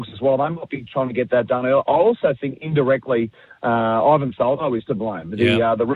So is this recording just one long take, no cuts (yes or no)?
yes